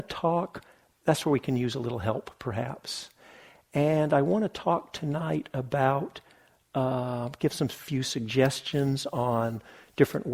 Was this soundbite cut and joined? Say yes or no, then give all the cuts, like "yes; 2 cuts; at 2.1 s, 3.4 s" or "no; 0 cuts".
no; 0 cuts